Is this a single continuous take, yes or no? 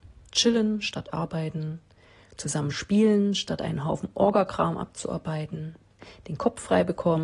yes